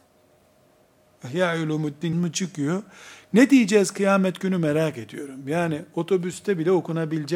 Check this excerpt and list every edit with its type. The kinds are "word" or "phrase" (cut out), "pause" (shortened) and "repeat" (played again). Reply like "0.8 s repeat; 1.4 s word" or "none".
2.1 s word